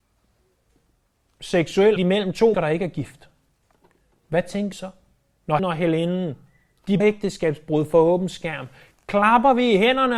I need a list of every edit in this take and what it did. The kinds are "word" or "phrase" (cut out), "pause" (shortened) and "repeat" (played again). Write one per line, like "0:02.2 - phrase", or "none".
0:02.0 - word
0:02.5 - word
0:04.7 - word
0:05.6 - word
0:07.0 - word